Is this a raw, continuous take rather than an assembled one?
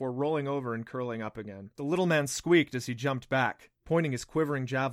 no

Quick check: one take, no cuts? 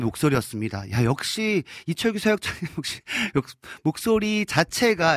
yes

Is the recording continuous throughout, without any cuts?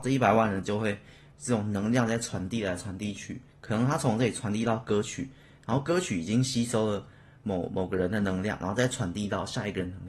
no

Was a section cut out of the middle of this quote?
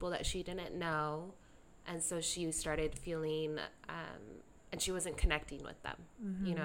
no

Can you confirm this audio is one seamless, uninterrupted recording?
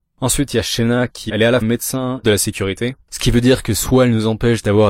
no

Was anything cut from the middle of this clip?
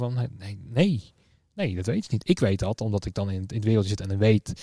no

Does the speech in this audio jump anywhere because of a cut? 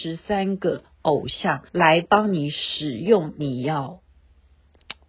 yes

